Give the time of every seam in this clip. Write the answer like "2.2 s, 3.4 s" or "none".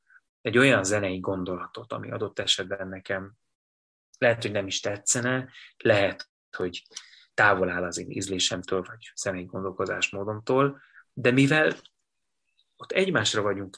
none